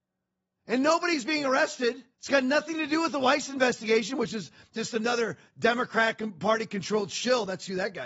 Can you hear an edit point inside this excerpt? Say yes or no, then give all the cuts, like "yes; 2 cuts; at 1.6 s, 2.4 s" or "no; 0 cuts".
yes; 1 cut; at 2.1 s